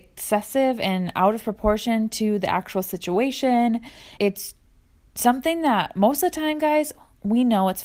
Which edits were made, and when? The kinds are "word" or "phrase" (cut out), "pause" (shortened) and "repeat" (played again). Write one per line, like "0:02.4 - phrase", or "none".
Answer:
0:04.2 - word